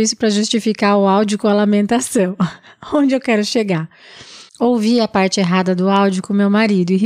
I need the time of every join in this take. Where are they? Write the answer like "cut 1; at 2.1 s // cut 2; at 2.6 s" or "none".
cut 1; at 4.5 s